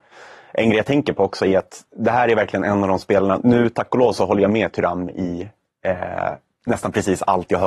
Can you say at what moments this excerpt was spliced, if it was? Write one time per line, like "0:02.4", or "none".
none